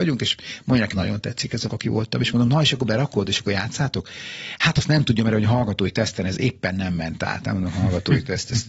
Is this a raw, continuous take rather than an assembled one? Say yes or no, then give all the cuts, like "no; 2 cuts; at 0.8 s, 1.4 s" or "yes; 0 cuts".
no; 2 cuts; at 0.9 s, 1.7 s